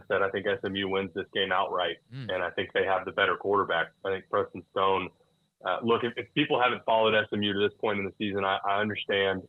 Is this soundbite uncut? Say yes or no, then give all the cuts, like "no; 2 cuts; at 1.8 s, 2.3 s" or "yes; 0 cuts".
yes; 0 cuts